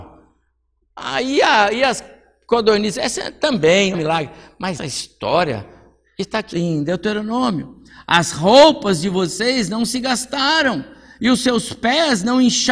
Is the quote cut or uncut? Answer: cut